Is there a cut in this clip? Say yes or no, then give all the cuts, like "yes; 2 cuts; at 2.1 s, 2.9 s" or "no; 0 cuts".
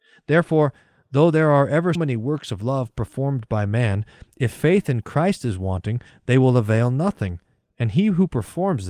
yes; 1 cut; at 1.9 s